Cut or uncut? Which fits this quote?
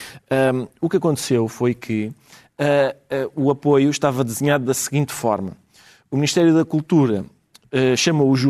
uncut